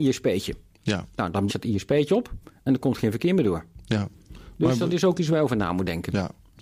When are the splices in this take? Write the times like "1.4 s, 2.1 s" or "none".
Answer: 1.5 s